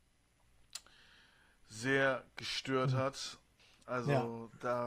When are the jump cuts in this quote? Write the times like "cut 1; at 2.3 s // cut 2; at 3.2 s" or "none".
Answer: cut 1; at 3.6 s